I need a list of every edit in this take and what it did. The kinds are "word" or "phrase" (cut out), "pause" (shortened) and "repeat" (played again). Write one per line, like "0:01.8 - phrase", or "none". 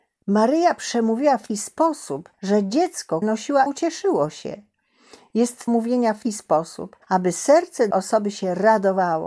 0:01.5 - word
0:02.3 - pause
0:03.2 - word
0:03.7 - word
0:05.7 - phrase
0:06.2 - word
0:07.0 - pause
0:07.9 - word